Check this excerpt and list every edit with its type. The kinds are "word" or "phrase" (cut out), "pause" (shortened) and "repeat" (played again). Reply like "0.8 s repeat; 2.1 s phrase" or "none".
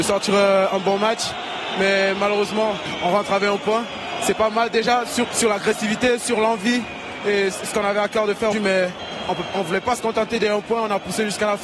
5.2 s word; 8.5 s word